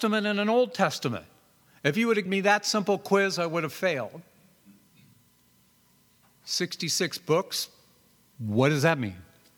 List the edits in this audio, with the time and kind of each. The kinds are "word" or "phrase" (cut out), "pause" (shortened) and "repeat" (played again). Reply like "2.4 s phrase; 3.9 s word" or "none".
2.3 s word